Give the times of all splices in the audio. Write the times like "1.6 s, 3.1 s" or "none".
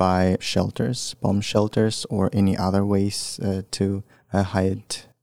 none